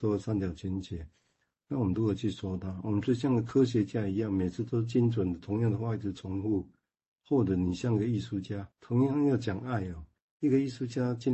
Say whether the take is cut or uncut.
cut